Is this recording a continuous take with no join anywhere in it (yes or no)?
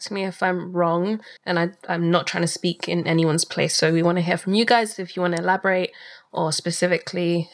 no